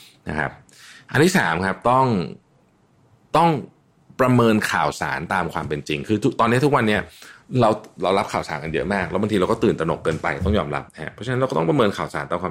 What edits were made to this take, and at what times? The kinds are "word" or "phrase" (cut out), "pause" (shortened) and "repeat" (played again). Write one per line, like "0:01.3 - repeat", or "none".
none